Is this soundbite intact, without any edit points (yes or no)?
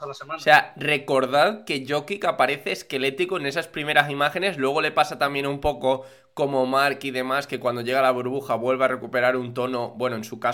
yes